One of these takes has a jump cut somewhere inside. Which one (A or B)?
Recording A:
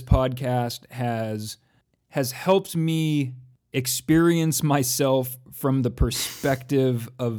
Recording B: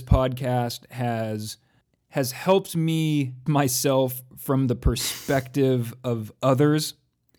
B